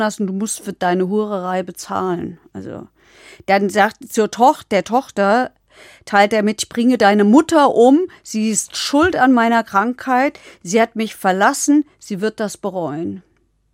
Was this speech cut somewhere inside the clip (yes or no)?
no